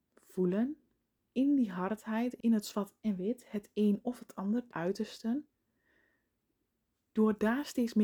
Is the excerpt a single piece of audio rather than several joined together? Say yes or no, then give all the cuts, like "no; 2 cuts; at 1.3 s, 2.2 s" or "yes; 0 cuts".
no; 3 cuts; at 1.2 s, 2.4 s, 4.7 s